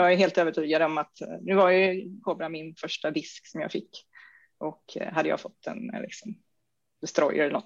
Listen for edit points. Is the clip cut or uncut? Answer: uncut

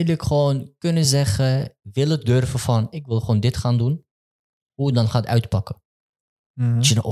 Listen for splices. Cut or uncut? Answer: uncut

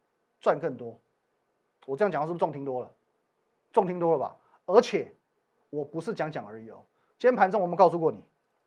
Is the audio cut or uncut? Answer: uncut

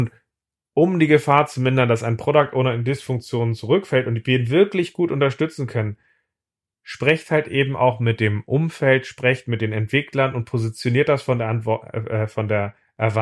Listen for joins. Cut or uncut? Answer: uncut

